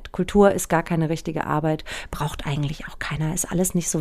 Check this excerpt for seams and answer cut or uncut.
uncut